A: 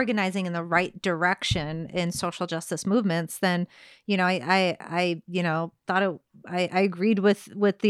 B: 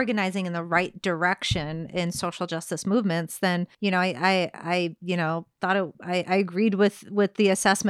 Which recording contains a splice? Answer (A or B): B